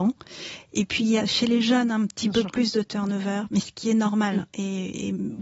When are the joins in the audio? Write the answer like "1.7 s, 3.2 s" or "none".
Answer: 1.2 s